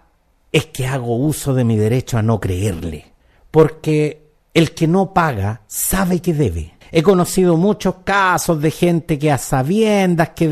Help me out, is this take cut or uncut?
cut